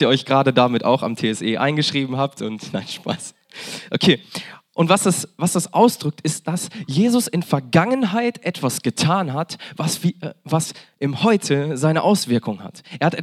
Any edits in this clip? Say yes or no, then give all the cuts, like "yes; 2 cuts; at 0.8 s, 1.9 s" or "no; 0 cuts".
no; 0 cuts